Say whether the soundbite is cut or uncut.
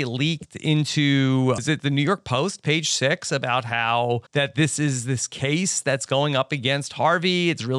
cut